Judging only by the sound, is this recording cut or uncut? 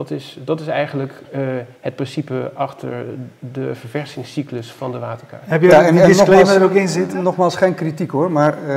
cut